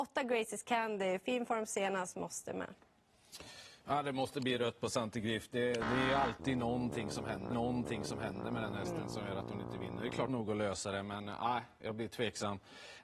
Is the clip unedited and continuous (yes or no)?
no